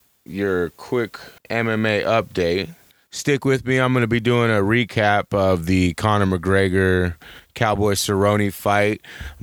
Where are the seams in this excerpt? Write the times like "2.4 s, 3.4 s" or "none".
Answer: 1.4 s, 2.9 s

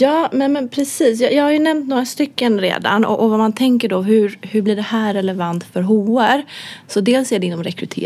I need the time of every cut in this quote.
none

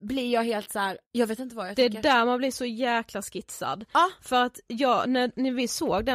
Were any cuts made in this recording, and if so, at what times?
1.1 s

